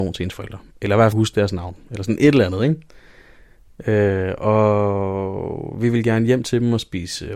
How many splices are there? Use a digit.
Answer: 1